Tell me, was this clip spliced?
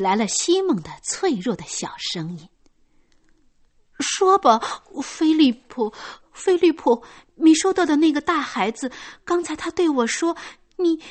yes; 3 cuts; at 2.5 s, 6.2 s, 7.3 s

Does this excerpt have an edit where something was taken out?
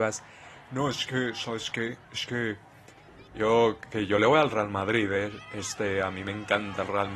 yes; 1 cut; at 2.0 s

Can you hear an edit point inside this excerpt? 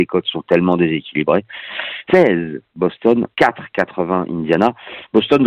yes; 2 cuts; at 2.1 s, 3.3 s

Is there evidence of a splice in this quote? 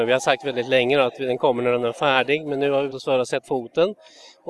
yes; 2 cuts; at 2.9 s, 3.4 s

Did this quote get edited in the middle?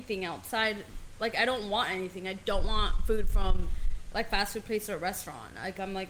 no; 0 cuts

